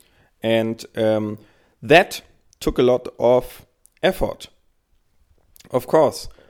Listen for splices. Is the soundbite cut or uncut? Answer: uncut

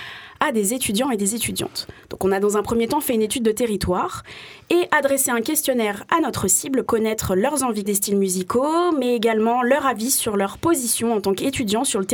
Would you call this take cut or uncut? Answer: cut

